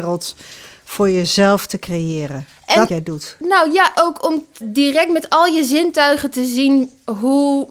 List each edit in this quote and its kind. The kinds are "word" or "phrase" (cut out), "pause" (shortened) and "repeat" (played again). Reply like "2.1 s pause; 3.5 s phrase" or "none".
2.9 s phrase; 3.9 s word; 4.6 s word